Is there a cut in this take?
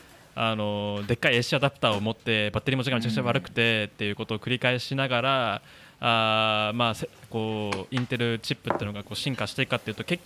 no; 0 cuts

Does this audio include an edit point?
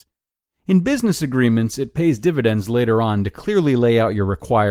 no; 0 cuts

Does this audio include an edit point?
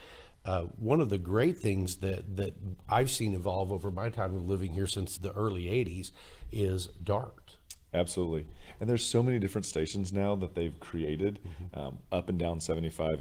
yes; 1 cut; at 5.2 s

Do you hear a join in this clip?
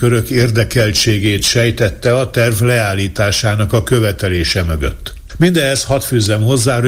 no; 0 cuts

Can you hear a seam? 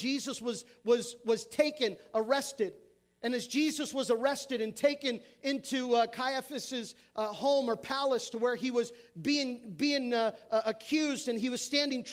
no; 0 cuts

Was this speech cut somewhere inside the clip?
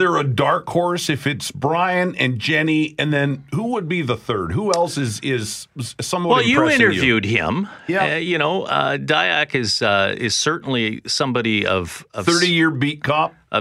no; 0 cuts

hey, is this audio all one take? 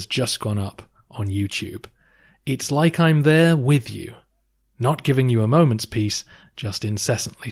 yes; 0 cuts

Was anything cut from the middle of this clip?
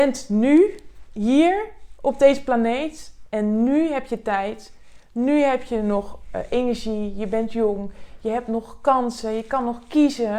no; 0 cuts

